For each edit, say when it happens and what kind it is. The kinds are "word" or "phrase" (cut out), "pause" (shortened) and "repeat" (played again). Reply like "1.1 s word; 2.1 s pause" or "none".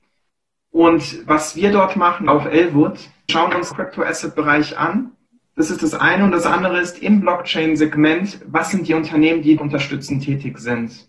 2.3 s phrase; 3.3 s word; 3.7 s phrase; 5.3 s pause; 9.6 s word